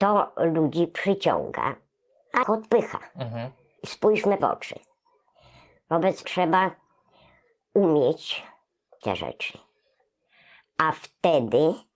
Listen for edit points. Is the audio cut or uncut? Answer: cut